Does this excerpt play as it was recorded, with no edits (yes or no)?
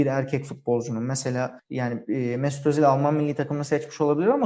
yes